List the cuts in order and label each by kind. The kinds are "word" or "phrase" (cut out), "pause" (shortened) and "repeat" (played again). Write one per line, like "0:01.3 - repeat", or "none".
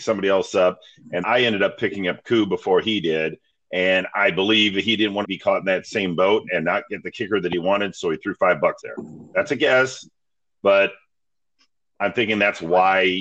0:01.2 - word
0:05.2 - word
0:08.8 - word